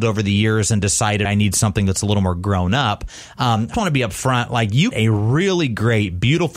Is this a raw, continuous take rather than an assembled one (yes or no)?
no